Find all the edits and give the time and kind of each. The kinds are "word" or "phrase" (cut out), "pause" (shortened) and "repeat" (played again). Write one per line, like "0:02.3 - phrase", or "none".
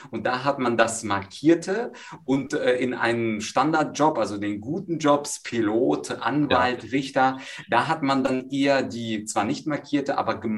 none